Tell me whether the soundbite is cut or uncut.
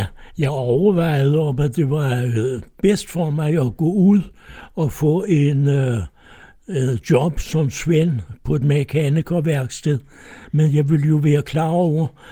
uncut